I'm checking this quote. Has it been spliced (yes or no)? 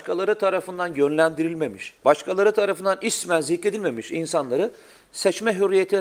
yes